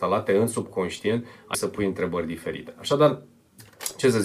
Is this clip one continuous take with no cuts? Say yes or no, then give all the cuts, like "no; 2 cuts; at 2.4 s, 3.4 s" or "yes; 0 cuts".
no; 1 cut; at 1.5 s